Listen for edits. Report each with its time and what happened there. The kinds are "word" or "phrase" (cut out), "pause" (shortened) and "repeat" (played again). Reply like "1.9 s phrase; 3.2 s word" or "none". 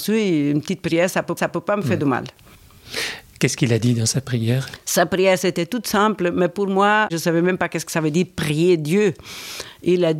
1.4 s repeat